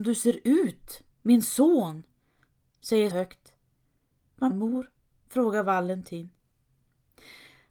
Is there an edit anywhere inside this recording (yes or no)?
yes